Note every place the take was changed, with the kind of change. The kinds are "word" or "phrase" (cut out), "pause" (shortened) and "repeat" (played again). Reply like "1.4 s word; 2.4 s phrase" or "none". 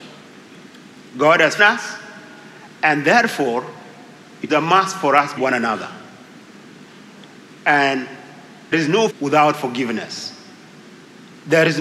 1.6 s word; 4.5 s word; 5.4 s word; 8.7 s word; 9.1 s word